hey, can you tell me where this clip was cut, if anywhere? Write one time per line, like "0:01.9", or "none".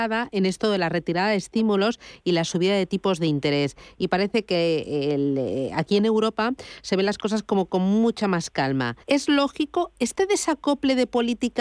0:09.0